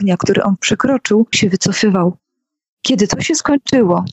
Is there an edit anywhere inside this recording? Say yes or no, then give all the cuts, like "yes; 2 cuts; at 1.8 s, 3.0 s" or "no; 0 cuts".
yes; 1 cut; at 1.3 s